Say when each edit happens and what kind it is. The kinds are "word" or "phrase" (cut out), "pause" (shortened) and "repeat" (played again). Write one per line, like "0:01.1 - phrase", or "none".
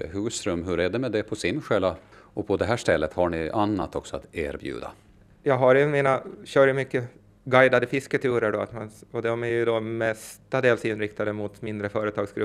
none